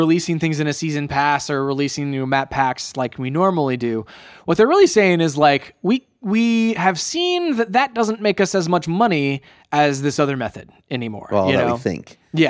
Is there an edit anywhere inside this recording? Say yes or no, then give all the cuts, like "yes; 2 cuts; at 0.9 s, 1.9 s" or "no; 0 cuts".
no; 0 cuts